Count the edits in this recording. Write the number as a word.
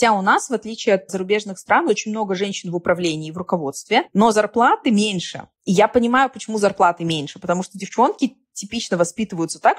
one